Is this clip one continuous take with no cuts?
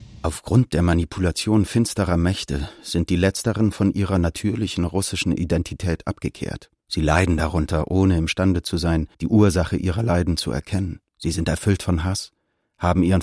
no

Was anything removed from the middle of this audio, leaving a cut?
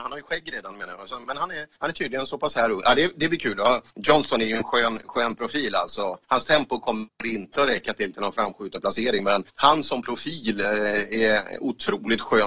yes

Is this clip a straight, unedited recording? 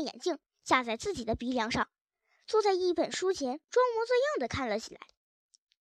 yes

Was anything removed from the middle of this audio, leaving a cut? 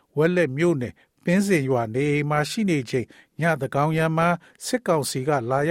no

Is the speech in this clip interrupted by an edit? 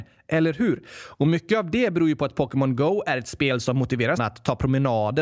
yes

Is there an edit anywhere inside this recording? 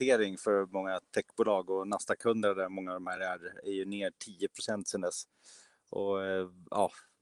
no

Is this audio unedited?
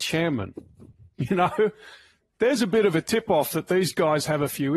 yes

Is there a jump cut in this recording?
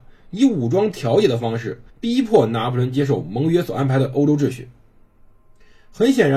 yes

